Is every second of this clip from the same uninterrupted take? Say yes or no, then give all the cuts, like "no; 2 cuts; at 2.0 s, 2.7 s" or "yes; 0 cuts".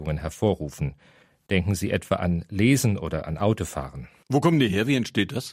yes; 0 cuts